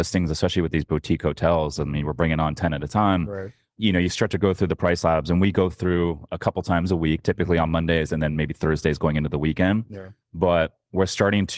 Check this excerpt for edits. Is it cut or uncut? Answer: uncut